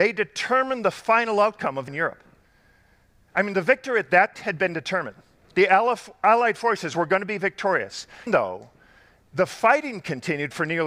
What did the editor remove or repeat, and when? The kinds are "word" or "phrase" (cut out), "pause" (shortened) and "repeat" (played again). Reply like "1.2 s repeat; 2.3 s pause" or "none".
1.9 s word; 4.3 s word; 8.3 s word